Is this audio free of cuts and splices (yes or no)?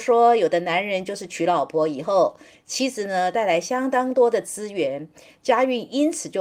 yes